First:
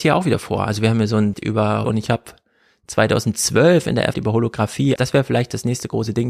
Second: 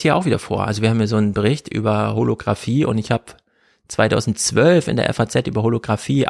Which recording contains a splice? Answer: first; 4 cuts; at 1.3 s, 1.8 s, 4.1 s, 5.0 s

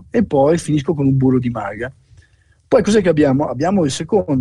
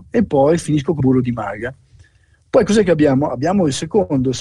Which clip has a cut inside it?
second; 1 cut; at 1.0 s

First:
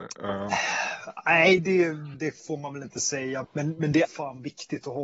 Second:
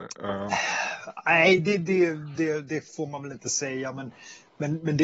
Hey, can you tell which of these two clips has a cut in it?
first; 4 cuts; at 1.6 s, 2.1 s, 3.4 s, 4.0 s

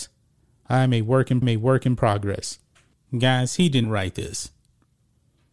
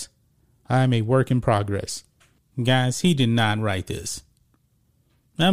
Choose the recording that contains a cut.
first; 2 cuts; at 1.4 s, 3.8 s

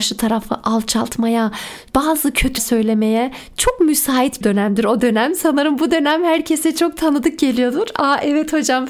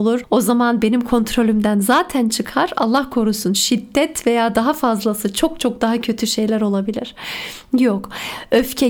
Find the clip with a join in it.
first; 2 cuts; at 2.6 s, 4.4 s

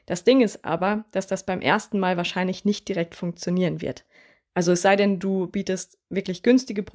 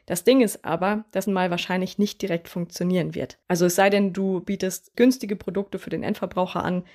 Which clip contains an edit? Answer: second; 3 cuts; at 1.3 s, 3.4 s, 4.9 s

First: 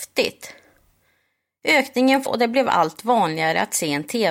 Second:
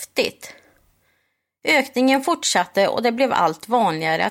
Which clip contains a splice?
first; 1 cut; at 2.3 s

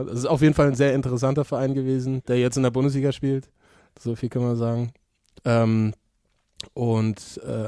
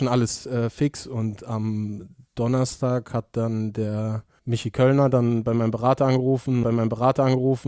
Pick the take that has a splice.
second; 3 cuts; at 2.3 s, 4.4 s, 6.6 s

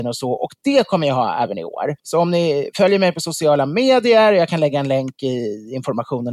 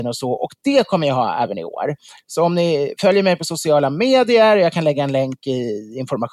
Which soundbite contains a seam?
first; 1 cut; at 2.0 s

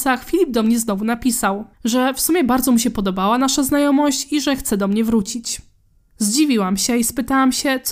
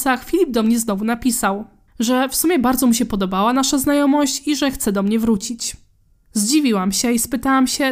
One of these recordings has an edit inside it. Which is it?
first; 1 cut; at 1.7 s

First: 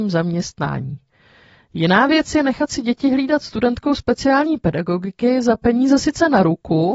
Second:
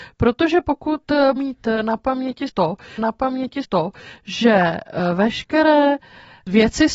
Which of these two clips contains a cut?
second; 2 cuts; at 1.4 s, 3.0 s

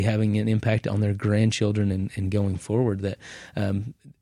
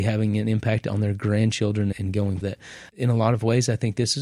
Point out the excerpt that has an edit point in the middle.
second; 3 cuts; at 1.9 s, 2.4 s, 2.9 s

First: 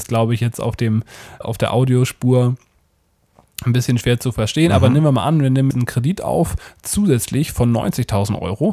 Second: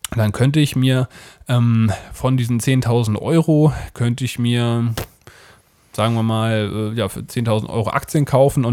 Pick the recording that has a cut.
first; 2 cuts; at 1.4 s, 5.7 s

